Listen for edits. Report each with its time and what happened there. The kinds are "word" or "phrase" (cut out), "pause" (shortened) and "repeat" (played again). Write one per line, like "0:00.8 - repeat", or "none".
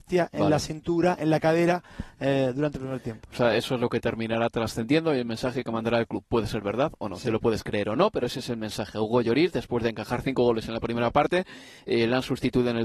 none